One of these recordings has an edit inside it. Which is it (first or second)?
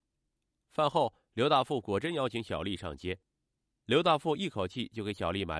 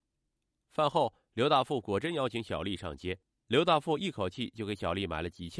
second